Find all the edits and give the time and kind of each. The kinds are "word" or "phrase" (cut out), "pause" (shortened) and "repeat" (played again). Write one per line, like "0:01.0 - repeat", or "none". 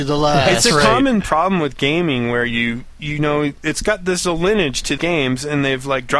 0:02.9 - word
0:05.0 - word